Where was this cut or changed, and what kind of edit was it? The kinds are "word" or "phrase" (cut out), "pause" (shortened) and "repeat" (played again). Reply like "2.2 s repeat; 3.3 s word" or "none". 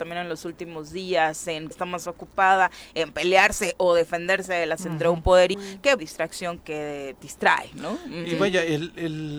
1.7 s phrase; 4.8 s word; 5.5 s word; 6.0 s phrase; 6.6 s word; 7.2 s word